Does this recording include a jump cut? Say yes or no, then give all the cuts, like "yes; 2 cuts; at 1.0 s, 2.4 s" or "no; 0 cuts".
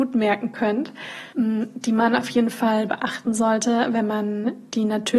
yes; 1 cut; at 1.3 s